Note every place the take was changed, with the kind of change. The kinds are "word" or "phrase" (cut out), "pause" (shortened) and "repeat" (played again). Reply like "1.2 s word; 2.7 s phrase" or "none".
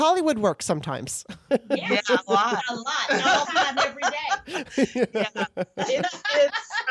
3.4 s word